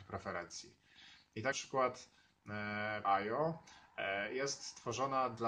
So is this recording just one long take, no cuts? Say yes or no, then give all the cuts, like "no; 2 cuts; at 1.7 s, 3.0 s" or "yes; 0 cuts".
no; 2 cuts; at 1.5 s, 3.0 s